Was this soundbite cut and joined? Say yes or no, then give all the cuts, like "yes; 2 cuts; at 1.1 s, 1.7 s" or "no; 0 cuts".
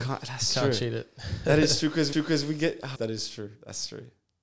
yes; 2 cuts; at 2.1 s, 3.0 s